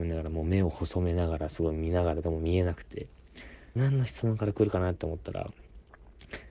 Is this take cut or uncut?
cut